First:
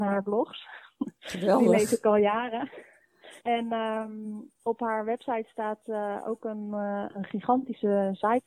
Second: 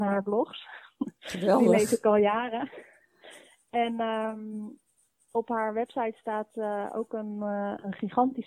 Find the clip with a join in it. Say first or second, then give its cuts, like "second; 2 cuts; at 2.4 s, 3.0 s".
first; 2 cuts; at 3.4 s, 4.5 s